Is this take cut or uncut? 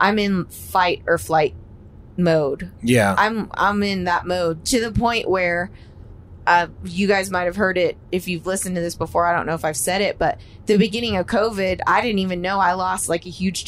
uncut